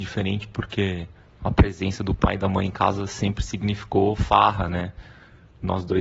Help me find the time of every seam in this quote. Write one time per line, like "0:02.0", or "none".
none